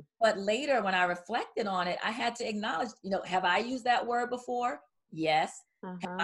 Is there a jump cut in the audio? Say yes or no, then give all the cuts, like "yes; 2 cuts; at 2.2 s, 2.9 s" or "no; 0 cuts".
no; 0 cuts